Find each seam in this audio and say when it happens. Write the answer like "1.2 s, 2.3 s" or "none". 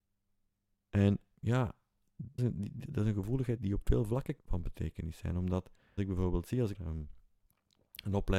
2.4 s, 3.6 s, 4.4 s, 6.0 s, 6.7 s